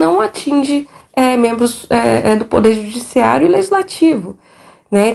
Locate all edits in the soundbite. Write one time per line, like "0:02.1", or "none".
none